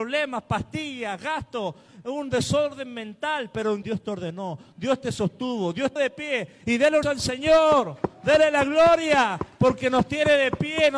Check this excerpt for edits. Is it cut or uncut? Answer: cut